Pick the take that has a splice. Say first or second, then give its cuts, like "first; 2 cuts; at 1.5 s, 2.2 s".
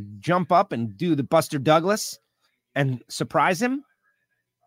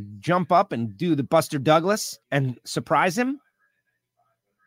second; 1 cut; at 2.2 s